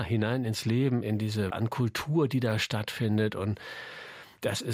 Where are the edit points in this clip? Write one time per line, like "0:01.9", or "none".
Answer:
0:01.0
0:01.5

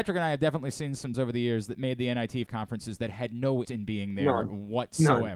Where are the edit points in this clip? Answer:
0:01.1
0:02.5
0:03.6

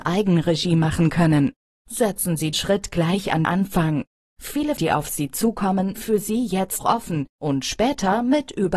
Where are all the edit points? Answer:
0:02.5
0:03.4
0:04.8
0:06.0
0:06.8

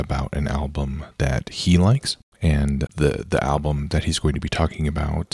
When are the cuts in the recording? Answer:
0:02.9

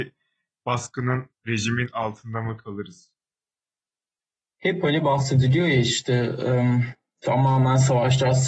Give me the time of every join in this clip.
0:01.4

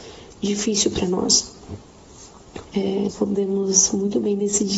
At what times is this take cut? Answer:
0:02.6
0:03.1

